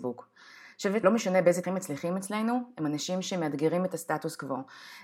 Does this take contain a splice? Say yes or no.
yes